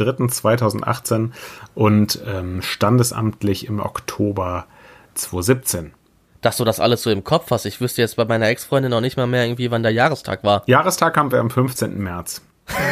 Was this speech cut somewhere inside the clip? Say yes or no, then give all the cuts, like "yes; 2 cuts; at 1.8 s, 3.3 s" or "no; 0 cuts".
no; 0 cuts